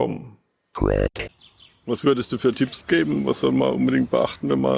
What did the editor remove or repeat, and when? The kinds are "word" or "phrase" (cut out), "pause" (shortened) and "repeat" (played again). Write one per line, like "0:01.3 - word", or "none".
0:02.8 - word